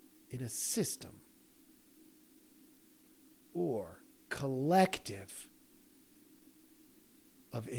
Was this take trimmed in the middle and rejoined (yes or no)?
yes